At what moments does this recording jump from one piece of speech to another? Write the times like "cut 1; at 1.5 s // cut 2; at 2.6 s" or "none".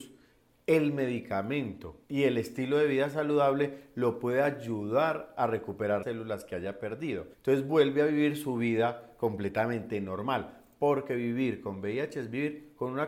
cut 1; at 2.0 s // cut 2; at 6.0 s // cut 3; at 7.3 s